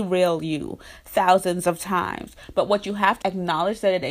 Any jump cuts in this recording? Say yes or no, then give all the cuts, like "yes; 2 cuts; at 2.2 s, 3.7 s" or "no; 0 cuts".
yes; 1 cut; at 3.2 s